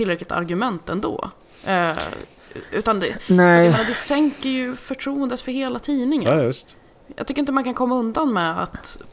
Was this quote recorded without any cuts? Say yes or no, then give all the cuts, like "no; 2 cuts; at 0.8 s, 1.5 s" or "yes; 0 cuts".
yes; 0 cuts